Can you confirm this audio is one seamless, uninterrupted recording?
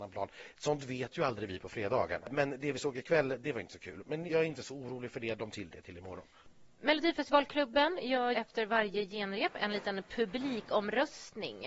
no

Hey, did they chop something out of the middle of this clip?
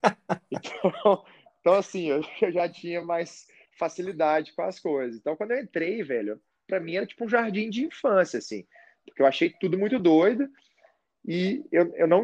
no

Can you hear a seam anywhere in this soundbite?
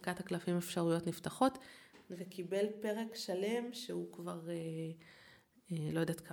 no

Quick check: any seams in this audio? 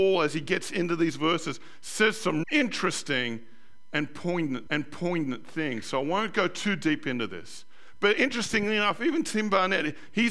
yes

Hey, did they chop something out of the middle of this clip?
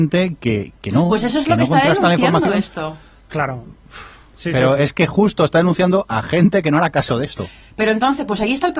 no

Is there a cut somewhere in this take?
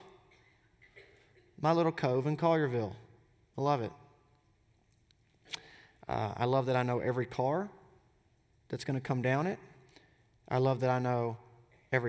no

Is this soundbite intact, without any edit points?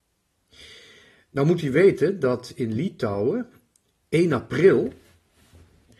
yes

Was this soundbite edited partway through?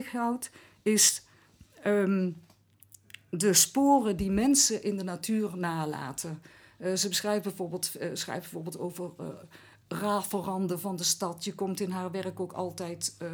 no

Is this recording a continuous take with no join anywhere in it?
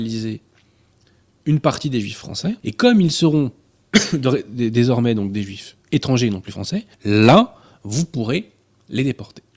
no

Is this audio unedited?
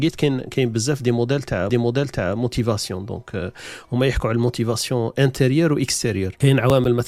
no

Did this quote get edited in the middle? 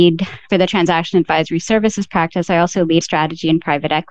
yes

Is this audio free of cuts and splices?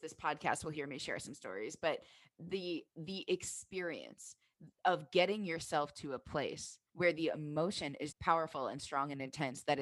no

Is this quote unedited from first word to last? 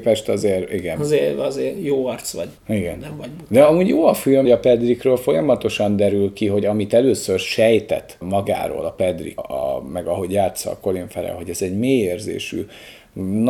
no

